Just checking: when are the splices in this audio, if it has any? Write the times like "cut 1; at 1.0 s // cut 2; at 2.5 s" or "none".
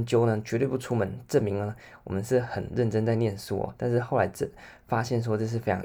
none